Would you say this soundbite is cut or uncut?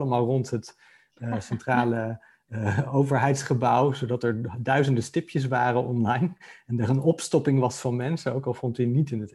uncut